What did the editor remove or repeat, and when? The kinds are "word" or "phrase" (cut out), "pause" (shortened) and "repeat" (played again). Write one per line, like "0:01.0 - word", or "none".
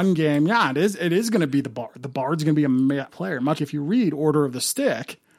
0:03.1 - word
0:03.5 - word